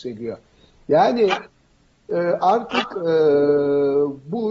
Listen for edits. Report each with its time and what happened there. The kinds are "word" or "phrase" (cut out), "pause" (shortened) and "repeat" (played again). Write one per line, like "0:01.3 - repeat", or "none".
none